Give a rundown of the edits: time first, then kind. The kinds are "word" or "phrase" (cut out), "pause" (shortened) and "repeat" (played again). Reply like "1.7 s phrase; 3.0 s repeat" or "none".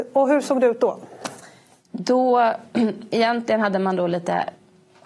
none